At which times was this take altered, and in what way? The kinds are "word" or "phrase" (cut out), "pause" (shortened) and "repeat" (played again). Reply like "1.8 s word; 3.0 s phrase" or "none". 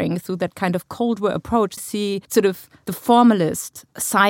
1.8 s phrase; 2.2 s pause